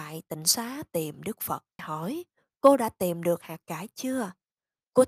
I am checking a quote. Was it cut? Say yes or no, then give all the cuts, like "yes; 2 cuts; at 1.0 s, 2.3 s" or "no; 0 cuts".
yes; 1 cut; at 1.8 s